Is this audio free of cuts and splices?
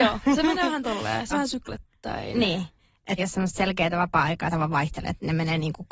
no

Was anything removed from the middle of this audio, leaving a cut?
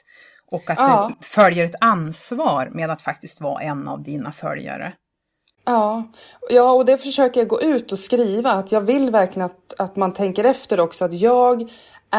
no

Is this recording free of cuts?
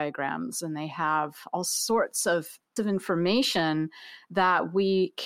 no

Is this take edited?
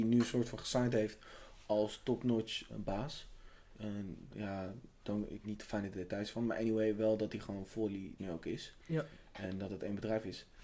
yes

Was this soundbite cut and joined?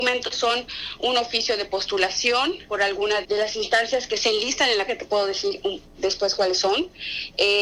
yes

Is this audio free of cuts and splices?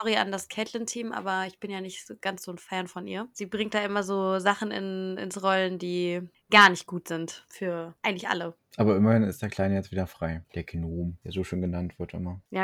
yes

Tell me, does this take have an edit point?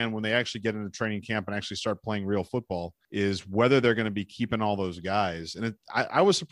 no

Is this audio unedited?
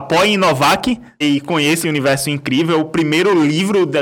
no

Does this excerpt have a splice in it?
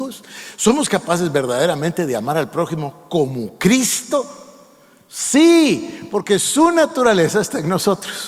no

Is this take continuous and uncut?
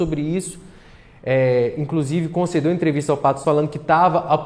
no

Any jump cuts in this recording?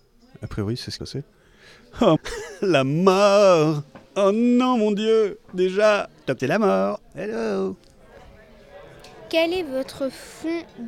yes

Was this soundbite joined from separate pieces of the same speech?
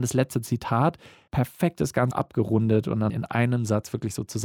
yes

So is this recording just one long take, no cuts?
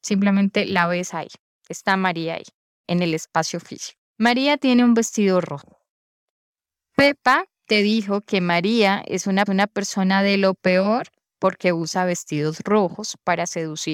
no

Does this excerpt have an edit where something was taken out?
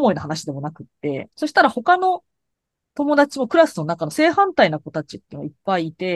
yes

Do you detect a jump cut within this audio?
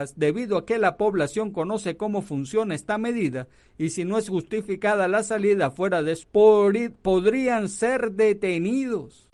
yes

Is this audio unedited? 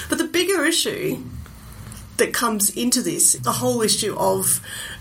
no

